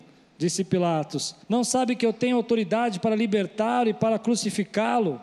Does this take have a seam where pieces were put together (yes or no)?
yes